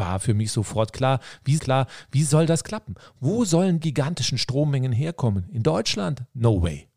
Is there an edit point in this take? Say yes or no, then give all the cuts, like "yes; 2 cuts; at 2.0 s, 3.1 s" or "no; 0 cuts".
yes; 2 cuts; at 1.6 s, 3.8 s